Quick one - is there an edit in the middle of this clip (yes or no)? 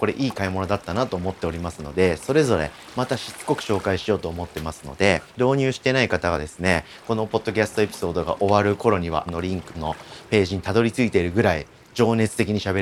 yes